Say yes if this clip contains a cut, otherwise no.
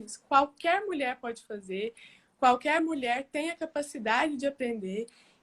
no